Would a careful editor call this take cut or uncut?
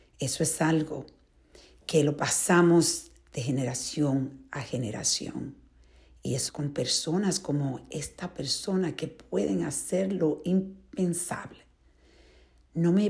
cut